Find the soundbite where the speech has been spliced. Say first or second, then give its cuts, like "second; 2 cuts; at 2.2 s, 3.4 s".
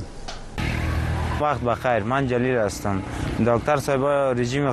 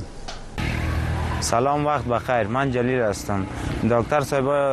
first; 1 cut; at 1.4 s